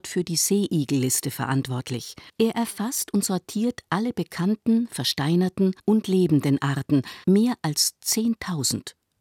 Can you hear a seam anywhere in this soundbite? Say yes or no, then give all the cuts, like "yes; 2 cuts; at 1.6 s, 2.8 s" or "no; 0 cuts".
yes; 3 cuts; at 2.3 s, 5.8 s, 7.2 s